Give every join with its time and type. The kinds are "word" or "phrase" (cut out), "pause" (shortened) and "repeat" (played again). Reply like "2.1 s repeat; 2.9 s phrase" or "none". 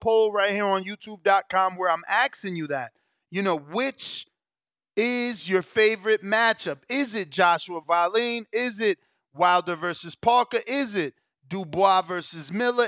7.8 s word